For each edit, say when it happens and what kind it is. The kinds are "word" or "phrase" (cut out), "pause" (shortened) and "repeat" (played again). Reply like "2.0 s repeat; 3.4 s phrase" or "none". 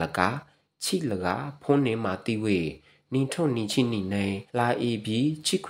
4.5 s pause